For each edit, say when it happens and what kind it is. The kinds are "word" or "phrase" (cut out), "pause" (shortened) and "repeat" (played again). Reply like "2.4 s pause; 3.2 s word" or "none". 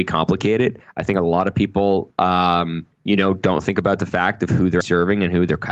4.8 s word